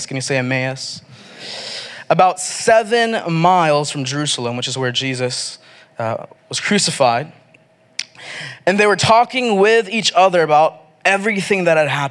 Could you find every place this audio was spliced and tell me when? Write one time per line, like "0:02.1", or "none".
0:06.4